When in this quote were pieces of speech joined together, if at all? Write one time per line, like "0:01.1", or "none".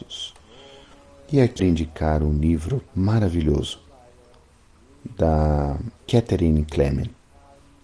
0:01.6
0:02.9
0:06.0